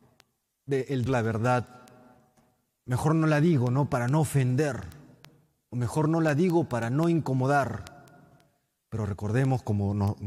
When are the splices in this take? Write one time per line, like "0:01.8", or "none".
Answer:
0:01.1